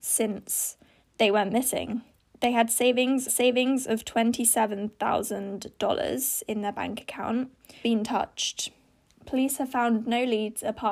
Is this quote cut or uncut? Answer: cut